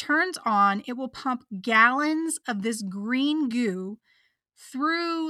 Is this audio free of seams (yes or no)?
yes